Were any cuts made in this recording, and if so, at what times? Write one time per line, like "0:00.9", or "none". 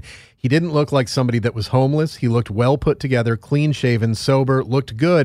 none